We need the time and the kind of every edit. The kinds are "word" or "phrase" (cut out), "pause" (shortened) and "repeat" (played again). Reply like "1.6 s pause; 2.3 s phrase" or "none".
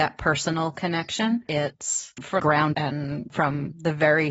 1.5 s word; 2.4 s word; 2.7 s word